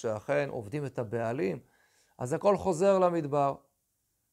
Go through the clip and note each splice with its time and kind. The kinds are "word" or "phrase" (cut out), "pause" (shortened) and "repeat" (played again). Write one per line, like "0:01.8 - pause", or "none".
none